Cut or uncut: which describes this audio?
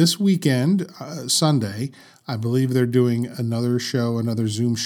uncut